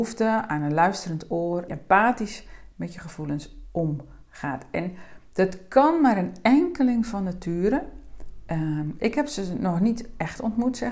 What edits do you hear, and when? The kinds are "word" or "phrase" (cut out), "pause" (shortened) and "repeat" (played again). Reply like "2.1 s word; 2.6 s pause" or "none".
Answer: 1.7 s phrase